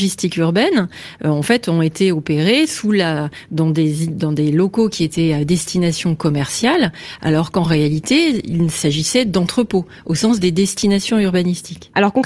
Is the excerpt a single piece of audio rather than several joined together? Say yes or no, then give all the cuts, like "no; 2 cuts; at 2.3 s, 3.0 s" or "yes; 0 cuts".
yes; 0 cuts